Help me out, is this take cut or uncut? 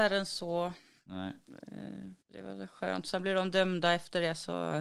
cut